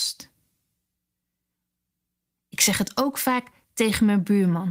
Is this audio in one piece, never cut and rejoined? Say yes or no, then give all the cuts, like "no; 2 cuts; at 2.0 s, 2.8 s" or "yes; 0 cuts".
yes; 0 cuts